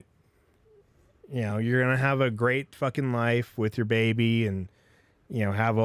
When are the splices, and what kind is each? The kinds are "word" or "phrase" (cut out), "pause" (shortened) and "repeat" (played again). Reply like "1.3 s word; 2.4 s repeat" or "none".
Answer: none